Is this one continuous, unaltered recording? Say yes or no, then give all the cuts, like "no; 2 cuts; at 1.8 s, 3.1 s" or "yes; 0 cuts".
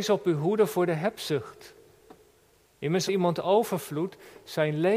no; 1 cut; at 3.1 s